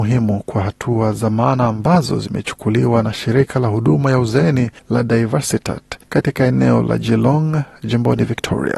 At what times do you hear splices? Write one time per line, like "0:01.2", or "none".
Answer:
0:04.8
0:06.0